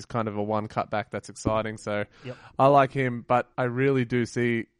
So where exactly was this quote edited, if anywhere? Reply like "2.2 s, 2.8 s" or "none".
3.5 s